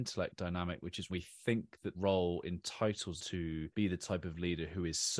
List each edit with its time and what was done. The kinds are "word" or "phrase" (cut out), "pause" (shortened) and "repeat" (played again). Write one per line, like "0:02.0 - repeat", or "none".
0:01.1 - word
0:01.9 - word
0:03.2 - word
0:03.7 - pause